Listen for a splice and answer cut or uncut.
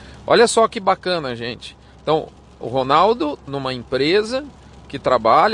cut